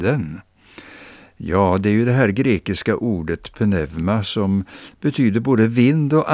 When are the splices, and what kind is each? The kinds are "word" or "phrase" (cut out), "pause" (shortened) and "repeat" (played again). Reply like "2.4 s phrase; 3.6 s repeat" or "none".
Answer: none